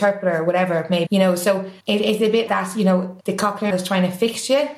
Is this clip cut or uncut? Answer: cut